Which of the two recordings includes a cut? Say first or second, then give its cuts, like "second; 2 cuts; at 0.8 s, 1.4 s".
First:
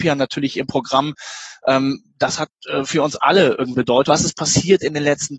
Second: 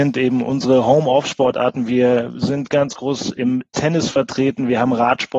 first; 1 cut; at 3.7 s